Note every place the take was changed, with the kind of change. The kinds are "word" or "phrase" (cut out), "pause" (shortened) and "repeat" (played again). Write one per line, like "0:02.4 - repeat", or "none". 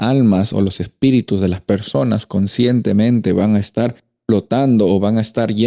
none